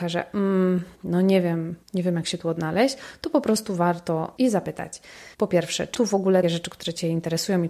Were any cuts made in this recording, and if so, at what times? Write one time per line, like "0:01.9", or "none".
0:00.9
0:01.8
0:04.4
0:05.3
0:05.9
0:06.4